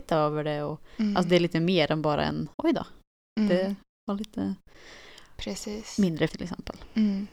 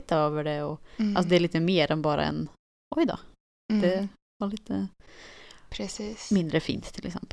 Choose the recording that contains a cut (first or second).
first